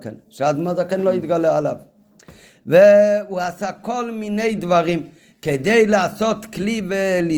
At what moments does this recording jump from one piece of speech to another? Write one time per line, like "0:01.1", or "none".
none